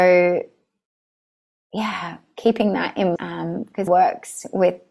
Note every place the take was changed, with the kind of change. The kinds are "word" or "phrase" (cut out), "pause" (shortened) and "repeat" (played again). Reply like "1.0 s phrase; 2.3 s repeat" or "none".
3.2 s word; 3.9 s phrase